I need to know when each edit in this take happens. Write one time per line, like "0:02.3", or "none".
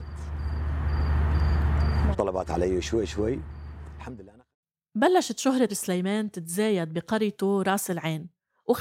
0:02.1
0:02.8
0:05.7